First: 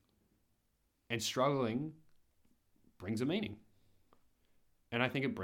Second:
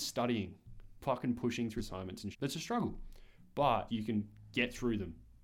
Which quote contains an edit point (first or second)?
second